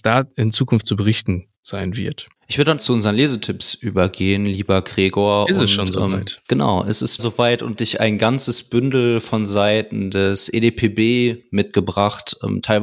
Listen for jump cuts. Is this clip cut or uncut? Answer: cut